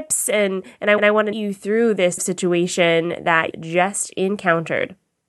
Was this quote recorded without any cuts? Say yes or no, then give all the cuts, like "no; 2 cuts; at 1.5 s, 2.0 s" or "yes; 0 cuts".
no; 4 cuts; at 1.0 s, 1.3 s, 2.2 s, 3.5 s